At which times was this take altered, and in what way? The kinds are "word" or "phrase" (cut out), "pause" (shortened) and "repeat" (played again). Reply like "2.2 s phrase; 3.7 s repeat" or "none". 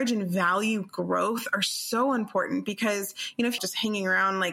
3.6 s phrase